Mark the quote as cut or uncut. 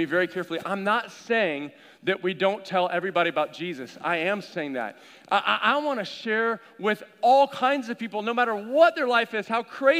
uncut